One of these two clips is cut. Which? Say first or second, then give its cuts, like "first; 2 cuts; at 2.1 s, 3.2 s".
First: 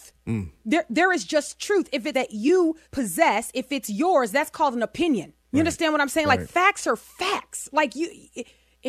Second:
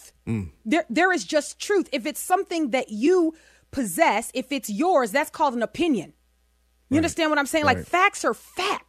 first; 3 cuts; at 2.1 s, 2.8 s, 5.4 s